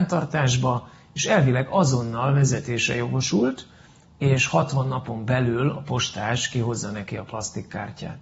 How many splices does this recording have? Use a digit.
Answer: 0